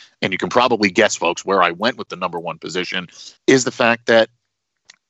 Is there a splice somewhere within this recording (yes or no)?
yes